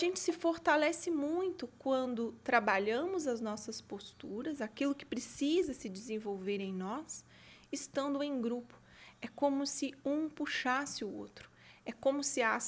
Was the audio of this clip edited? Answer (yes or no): no